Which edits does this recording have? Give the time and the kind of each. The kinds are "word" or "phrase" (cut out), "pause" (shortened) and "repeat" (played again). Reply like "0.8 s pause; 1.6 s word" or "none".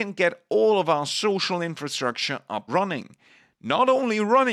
2.7 s word